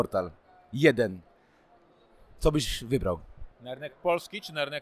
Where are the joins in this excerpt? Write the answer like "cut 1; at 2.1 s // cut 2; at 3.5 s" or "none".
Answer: cut 1; at 3.5 s